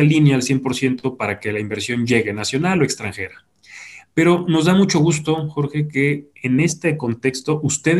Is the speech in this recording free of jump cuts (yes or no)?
yes